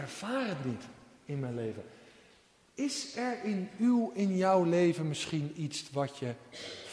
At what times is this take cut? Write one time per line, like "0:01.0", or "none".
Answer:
none